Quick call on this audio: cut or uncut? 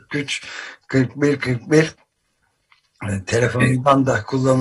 uncut